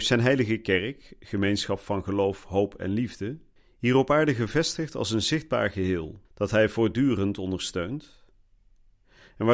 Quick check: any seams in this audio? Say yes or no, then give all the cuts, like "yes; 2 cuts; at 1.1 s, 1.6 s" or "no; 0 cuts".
yes; 2 cuts; at 3.6 s, 6.2 s